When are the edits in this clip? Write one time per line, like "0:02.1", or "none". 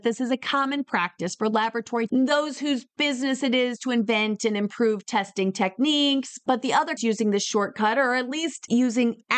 0:02.1
0:07.0